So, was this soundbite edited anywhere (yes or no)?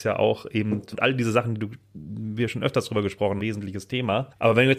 yes